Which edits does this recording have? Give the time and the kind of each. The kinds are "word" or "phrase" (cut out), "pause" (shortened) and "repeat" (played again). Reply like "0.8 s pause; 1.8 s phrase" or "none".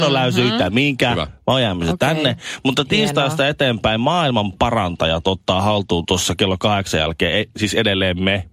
none